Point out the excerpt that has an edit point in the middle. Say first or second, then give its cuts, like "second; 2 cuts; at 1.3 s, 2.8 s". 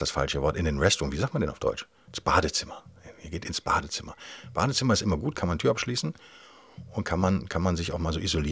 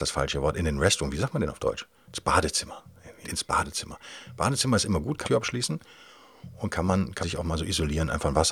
second; 3 cuts; at 3.2 s, 5.2 s, 7.2 s